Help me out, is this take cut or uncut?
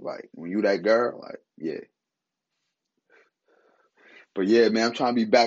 cut